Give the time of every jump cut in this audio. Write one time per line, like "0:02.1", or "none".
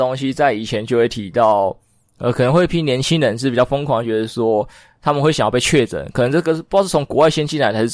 none

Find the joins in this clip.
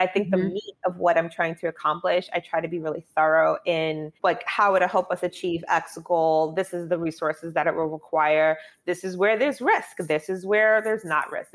0:04.2

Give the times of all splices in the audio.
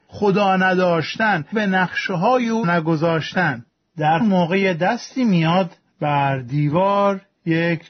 0:01.5
0:02.6
0:04.2
0:05.9

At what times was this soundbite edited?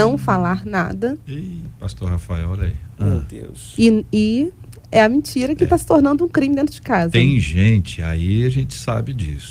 none

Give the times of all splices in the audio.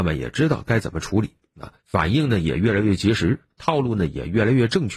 0:01.8
0:03.5

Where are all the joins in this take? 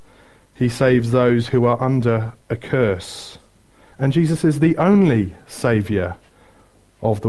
0:02.4
0:03.9

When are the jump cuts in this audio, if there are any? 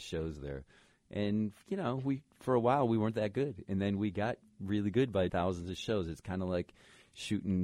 0:05.3

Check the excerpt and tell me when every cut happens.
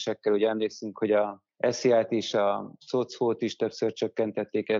0:01.5

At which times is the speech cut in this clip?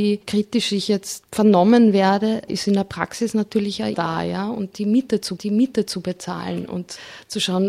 0:02.5
0:03.9
0:05.4

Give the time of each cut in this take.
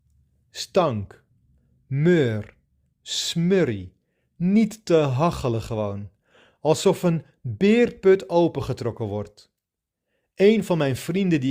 none

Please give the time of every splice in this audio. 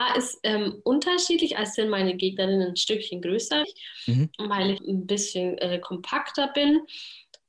0:01.7
0:03.6
0:04.8

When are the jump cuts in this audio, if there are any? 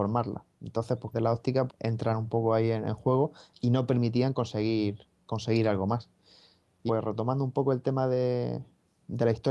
0:01.1
0:01.7
0:06.9

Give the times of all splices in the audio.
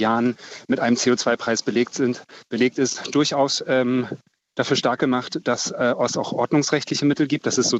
none

